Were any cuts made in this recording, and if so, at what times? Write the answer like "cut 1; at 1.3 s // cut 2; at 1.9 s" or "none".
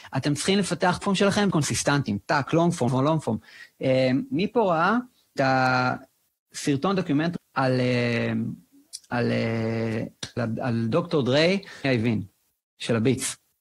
cut 1; at 1.0 s // cut 2; at 1.5 s // cut 3; at 2.5 s // cut 4; at 2.9 s // cut 5; at 5.4 s // cut 6; at 7.4 s // cut 7; at 10.4 s // cut 8; at 11.8 s